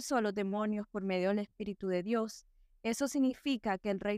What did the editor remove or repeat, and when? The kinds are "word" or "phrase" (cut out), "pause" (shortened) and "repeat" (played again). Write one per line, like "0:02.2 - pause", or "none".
none